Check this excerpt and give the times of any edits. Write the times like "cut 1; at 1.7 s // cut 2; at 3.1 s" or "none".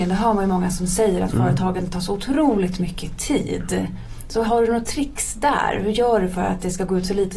cut 1; at 4.5 s

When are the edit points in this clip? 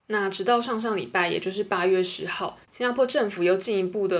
cut 1; at 2.6 s

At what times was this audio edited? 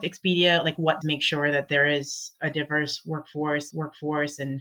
cut 1; at 1.0 s // cut 2; at 3.7 s

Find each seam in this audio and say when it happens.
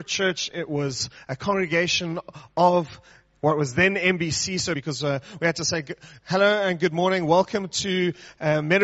cut 1; at 4.7 s

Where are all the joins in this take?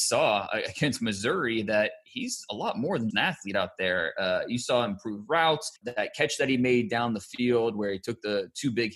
cut 1; at 3.1 s // cut 2; at 5.8 s

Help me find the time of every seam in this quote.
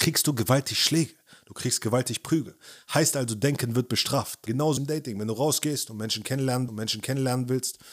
cut 1; at 4.8 s // cut 2; at 6.7 s

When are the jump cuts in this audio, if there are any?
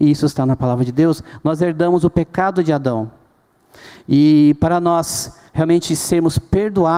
cut 1; at 5.5 s

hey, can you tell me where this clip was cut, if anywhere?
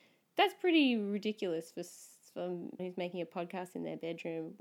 cut 1; at 2.8 s

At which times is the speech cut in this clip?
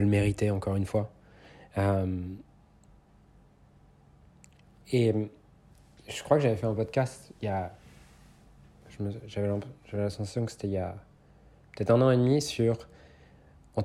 none

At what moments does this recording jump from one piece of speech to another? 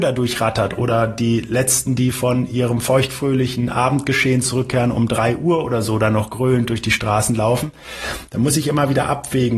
none

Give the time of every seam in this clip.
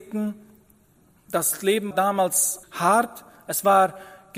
cut 1; at 1.9 s // cut 2; at 2.6 s

